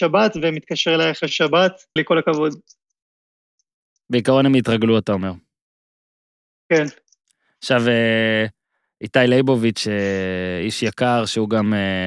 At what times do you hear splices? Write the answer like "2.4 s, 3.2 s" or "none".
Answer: 2.0 s